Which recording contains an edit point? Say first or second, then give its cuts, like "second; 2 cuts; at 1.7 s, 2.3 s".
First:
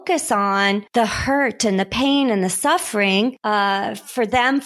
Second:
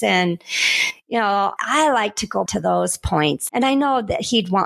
second; 3 cuts; at 1.6 s, 2.5 s, 3.5 s